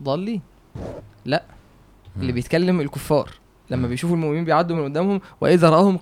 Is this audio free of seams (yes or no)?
yes